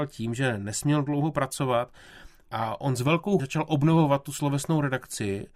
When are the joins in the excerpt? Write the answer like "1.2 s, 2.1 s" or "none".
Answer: 3.4 s